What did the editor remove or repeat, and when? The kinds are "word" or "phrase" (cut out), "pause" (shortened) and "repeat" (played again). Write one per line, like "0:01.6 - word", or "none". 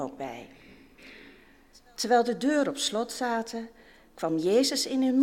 none